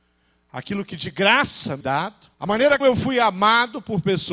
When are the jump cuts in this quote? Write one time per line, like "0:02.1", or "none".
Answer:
0:01.8
0:02.3
0:02.8